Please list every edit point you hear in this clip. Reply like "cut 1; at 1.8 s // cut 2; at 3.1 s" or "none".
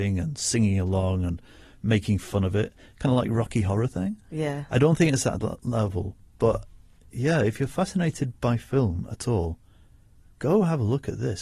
none